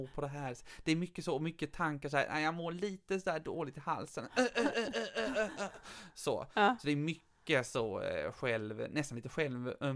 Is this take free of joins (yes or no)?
yes